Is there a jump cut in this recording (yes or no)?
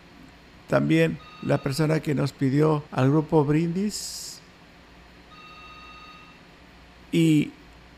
yes